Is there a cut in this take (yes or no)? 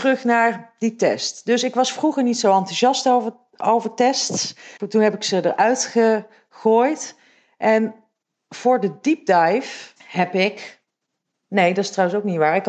yes